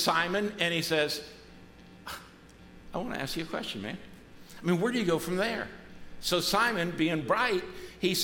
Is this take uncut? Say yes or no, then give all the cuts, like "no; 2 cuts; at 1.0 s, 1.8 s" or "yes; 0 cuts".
no; 1 cut; at 7.2 s